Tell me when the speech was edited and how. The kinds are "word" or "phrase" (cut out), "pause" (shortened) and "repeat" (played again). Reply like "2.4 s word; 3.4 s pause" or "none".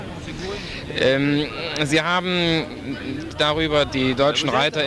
3.3 s word; 3.9 s word